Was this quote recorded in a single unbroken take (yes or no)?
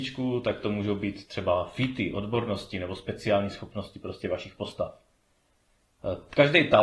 yes